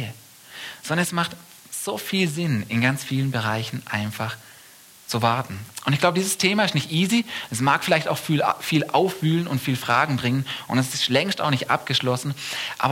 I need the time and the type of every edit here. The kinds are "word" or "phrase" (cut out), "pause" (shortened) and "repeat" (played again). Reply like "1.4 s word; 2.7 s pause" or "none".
none

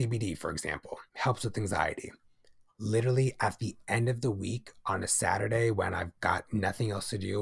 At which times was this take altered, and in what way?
1.1 s pause

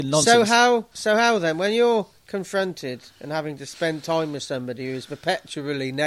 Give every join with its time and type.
0.9 s pause; 3.1 s pause

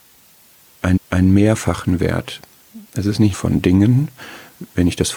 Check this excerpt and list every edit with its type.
1.0 s repeat; 2.9 s pause; 3.3 s phrase

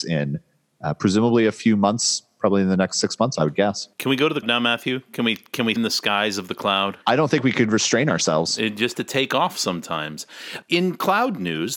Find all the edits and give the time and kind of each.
3.9 s pause; 4.4 s word; 5.8 s phrase; 7.0 s pause; 8.9 s word

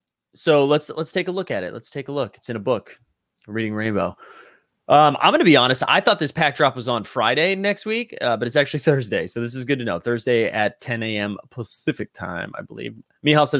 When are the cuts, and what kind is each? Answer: none

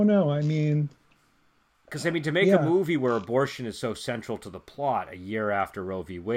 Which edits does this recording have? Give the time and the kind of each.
none

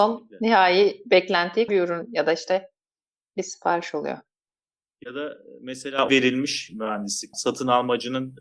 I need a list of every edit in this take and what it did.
1.7 s word; 6.1 s word; 7.3 s word

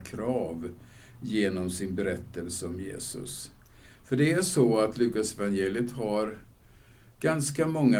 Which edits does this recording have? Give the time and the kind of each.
none

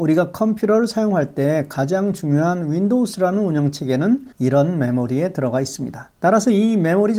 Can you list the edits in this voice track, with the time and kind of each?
4.3 s pause; 6.1 s pause

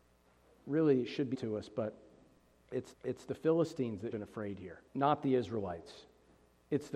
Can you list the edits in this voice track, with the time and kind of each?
1.3 s word; 2.9 s repeat; 4.1 s phrase; 4.9 s pause

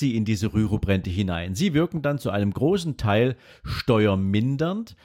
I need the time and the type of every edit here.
none

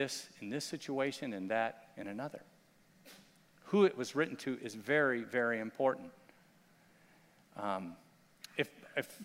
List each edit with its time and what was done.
none

